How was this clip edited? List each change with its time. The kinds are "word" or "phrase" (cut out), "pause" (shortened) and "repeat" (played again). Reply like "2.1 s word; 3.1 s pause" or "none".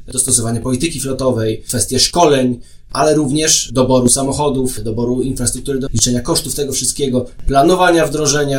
5.9 s word